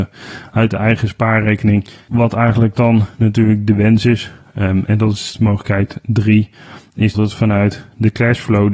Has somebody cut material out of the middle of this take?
yes; 1 cut; at 7.1 s

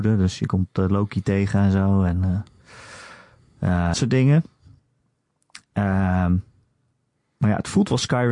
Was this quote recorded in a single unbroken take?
no; 1 cut; at 3.9 s

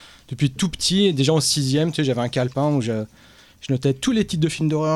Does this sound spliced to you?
no; 0 cuts

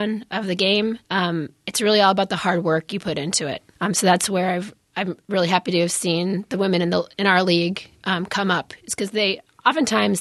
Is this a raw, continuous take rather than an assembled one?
no; 2 cuts; at 1.0 s, 3.7 s

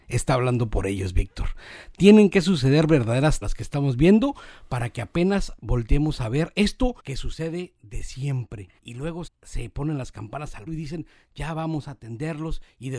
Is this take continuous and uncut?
no; 5 cuts; at 3.4 s, 7.0 s, 8.8 s, 9.3 s, 10.7 s

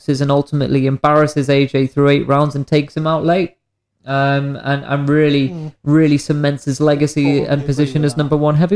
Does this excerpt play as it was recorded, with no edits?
yes; 0 cuts

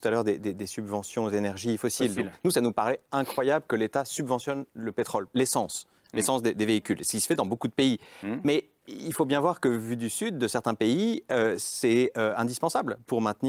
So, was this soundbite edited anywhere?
no; 0 cuts

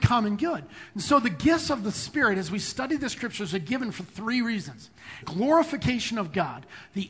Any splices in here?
yes; 1 cut; at 5.2 s

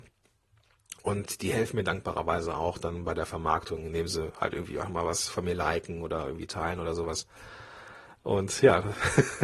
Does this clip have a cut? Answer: no; 0 cuts

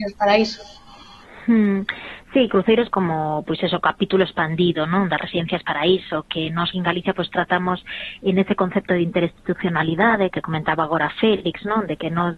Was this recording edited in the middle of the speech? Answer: yes; 2 cuts; at 2.9 s, 6.7 s

